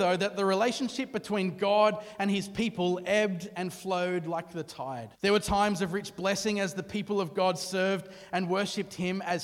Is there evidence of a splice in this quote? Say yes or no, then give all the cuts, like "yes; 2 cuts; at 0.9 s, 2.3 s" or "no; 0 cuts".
yes; 1 cut; at 5.2 s